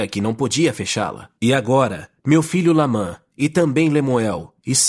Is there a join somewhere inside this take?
yes; 2 cuts; at 1.4 s, 2.2 s

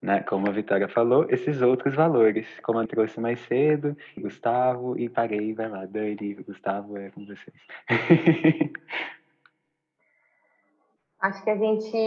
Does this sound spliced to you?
yes; 2 cuts; at 2.9 s, 4.2 s

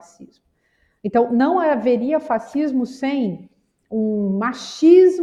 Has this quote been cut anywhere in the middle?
no; 0 cuts

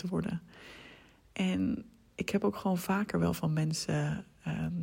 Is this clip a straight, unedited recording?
yes; 0 cuts

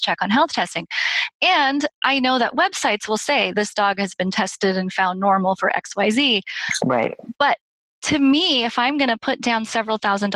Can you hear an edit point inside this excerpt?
no; 0 cuts

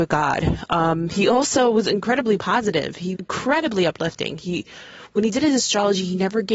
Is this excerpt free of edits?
no; 1 cut; at 3.1 s

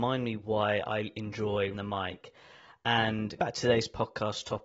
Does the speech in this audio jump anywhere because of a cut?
yes; 2 cuts; at 1.7 s, 3.4 s

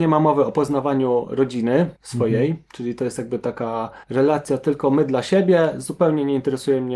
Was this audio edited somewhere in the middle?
yes; 2 cuts; at 2.0 s, 4.0 s

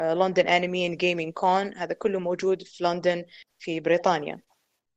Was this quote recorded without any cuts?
yes; 0 cuts

